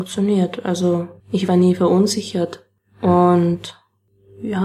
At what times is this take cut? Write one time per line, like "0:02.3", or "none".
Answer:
0:01.2